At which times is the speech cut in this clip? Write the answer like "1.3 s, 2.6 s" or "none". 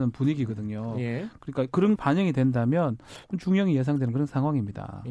2.0 s